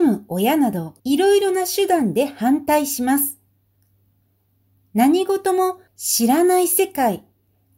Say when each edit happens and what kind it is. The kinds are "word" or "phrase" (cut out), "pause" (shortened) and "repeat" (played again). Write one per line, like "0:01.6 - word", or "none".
0:01.0 - pause
0:05.9 - pause